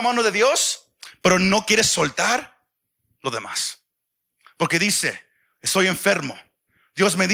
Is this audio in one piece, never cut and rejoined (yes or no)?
yes